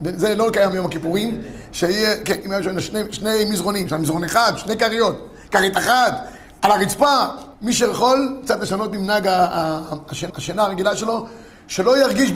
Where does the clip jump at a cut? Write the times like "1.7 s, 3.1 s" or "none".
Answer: 2.4 s, 7.5 s, 10.3 s